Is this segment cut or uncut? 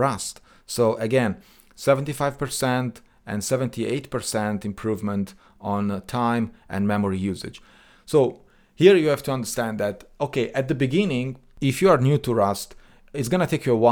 uncut